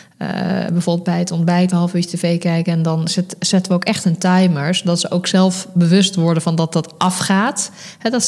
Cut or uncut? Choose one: cut